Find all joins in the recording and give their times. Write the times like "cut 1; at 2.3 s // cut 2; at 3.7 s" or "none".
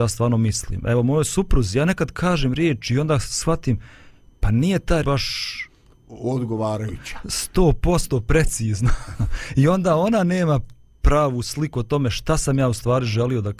cut 1; at 5.0 s